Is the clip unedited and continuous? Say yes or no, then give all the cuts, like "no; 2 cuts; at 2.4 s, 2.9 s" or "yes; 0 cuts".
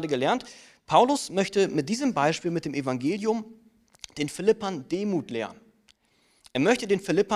yes; 0 cuts